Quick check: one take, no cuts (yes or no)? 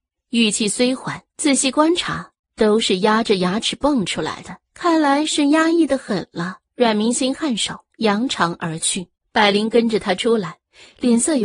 no